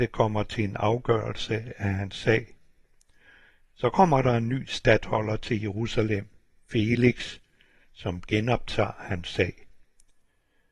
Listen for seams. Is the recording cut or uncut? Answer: uncut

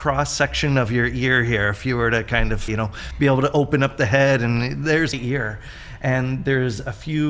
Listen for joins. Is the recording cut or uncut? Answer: cut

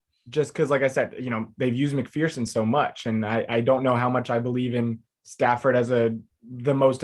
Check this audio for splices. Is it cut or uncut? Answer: uncut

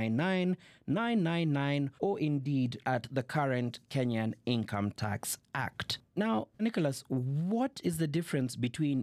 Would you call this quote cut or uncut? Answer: cut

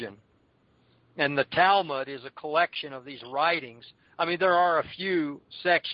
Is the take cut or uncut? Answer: uncut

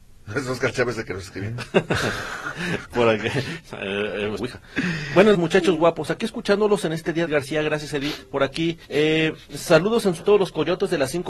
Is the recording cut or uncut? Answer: cut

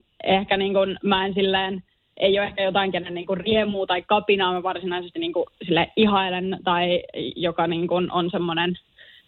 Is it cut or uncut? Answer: uncut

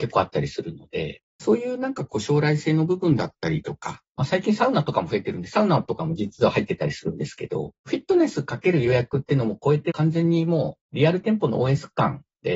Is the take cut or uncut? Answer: uncut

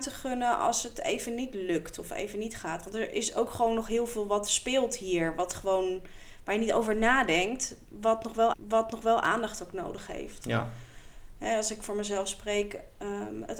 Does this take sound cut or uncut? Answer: cut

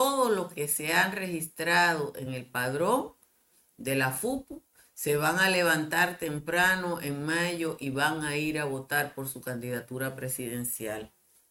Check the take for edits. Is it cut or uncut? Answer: uncut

